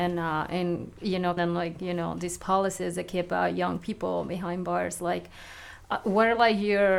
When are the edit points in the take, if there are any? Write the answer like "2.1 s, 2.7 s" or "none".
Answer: 1.4 s

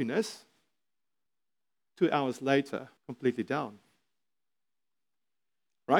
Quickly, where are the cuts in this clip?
1.3 s, 3.0 s

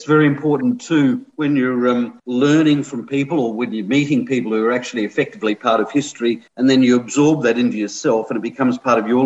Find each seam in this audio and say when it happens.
6.5 s

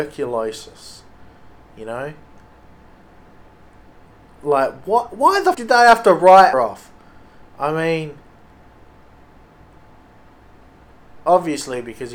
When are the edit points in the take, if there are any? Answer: 5.5 s, 6.5 s

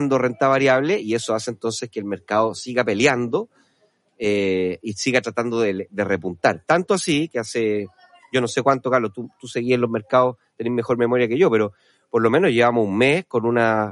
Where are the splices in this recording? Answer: none

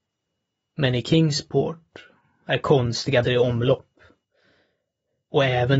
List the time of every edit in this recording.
3.2 s

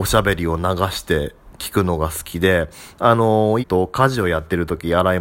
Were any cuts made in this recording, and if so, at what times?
3.6 s

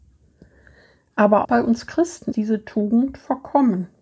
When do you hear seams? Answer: 1.4 s, 2.3 s

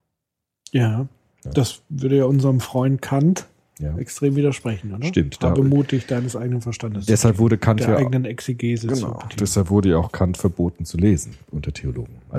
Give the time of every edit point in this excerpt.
none

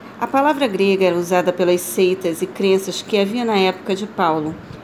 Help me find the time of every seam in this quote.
none

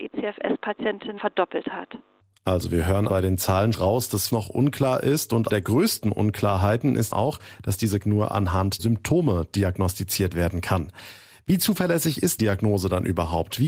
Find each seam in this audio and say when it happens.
1.2 s, 3.1 s, 3.7 s, 4.3 s, 5.5 s, 7.1 s, 8.0 s, 8.8 s, 12.4 s

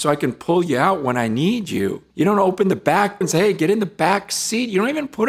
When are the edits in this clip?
2.1 s, 3.2 s

